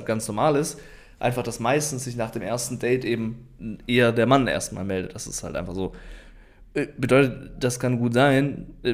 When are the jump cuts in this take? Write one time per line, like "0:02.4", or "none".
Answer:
none

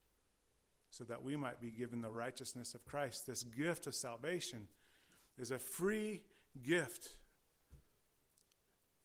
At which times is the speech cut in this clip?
none

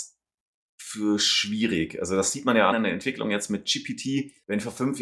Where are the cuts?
0:02.7

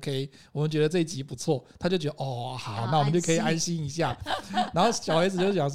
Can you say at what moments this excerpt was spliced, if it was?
none

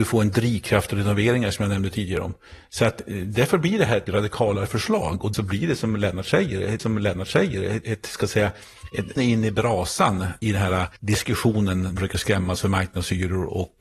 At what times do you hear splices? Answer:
0:04.1
0:05.3
0:06.8
0:09.2
0:10.4
0:11.0
0:12.0

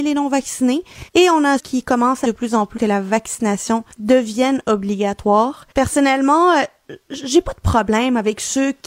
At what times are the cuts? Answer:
0:01.1
0:01.6
0:02.2
0:02.8
0:03.9
0:05.7

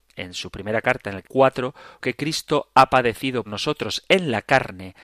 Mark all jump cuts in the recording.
0:01.2
0:02.0
0:03.5

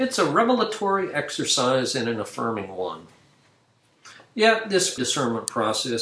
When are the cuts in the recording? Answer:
0:05.0

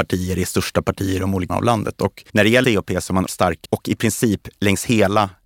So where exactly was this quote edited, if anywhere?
0:01.5
0:02.3
0:02.6
0:03.3
0:03.6

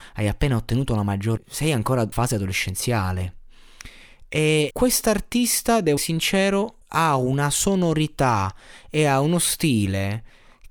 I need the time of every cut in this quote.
0:01.4
0:02.1
0:04.7
0:06.0
0:06.8

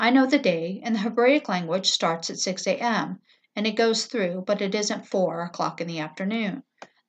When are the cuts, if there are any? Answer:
none

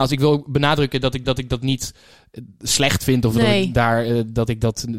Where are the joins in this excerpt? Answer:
0:01.2

